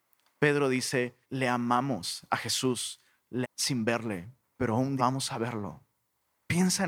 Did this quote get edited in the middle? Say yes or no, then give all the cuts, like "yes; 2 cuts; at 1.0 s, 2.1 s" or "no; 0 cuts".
yes; 4 cuts; at 1.2 s, 3.4 s, 4.4 s, 5.0 s